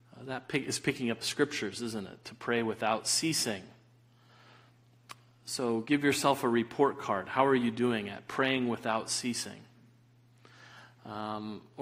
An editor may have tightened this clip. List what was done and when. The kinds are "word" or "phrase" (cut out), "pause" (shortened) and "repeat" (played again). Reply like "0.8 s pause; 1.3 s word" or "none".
1.2 s phrase